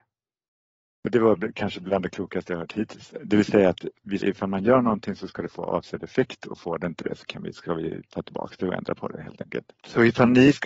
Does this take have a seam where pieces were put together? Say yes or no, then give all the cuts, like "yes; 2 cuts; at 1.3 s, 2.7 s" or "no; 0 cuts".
yes; 1 cut; at 4.2 s